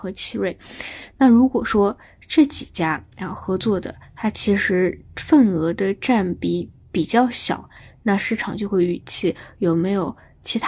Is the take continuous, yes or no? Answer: yes